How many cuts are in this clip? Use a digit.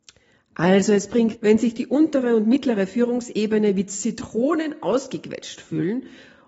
1